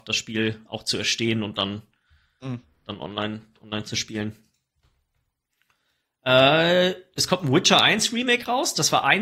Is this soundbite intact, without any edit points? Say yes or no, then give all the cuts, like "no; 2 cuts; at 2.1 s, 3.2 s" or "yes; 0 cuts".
yes; 0 cuts